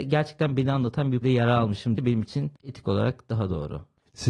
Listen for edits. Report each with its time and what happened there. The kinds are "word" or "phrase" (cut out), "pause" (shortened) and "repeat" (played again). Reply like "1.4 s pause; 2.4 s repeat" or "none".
1.2 s word; 2.0 s word